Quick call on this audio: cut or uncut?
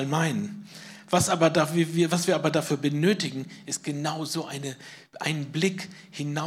uncut